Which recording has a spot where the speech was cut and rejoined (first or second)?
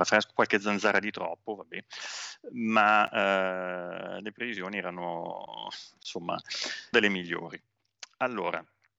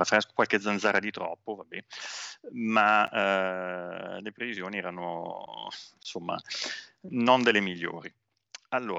first